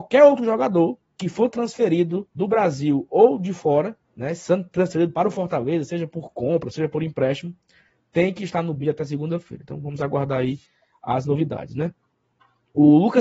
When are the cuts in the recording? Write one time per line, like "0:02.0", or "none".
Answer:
0:02.3
0:04.0